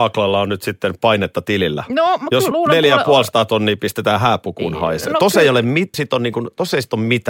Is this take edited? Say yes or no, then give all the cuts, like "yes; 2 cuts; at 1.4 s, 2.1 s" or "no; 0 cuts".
yes; 2 cuts; at 2.5 s, 5.9 s